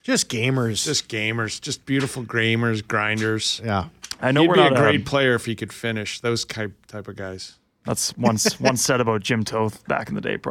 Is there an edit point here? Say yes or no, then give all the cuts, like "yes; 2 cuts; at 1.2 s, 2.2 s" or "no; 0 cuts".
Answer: no; 0 cuts